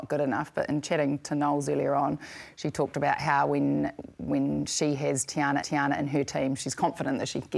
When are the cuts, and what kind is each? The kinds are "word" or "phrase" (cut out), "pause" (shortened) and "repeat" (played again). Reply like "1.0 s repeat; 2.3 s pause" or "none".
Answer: 5.6 s repeat